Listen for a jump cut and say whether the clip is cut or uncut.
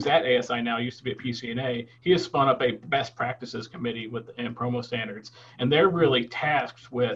uncut